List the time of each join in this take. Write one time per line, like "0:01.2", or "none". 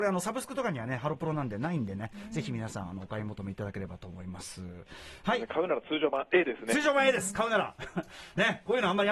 none